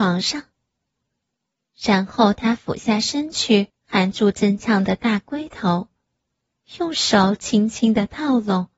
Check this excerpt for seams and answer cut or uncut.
cut